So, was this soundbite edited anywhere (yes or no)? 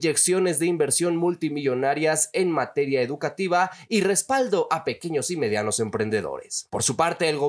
no